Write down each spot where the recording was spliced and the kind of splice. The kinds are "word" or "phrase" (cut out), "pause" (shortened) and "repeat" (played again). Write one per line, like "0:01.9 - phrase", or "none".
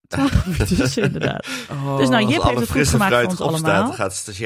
none